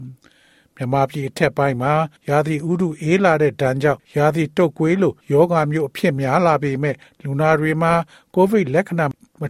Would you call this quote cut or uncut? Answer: cut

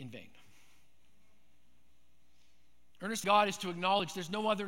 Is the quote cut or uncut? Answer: cut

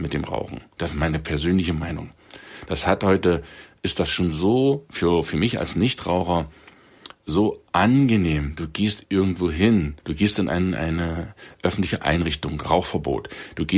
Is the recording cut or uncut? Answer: cut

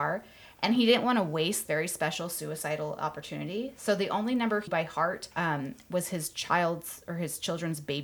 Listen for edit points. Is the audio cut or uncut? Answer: cut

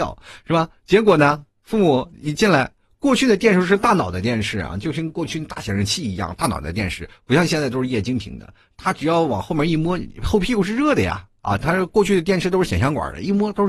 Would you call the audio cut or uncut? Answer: uncut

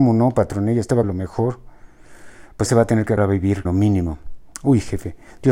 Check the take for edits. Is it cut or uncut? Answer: cut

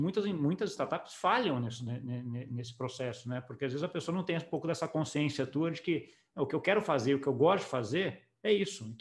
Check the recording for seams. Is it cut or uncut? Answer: uncut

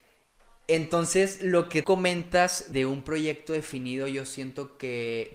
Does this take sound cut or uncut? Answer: cut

